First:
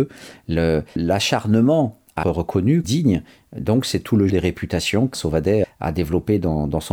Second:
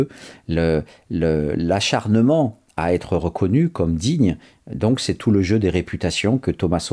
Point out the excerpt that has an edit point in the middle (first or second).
first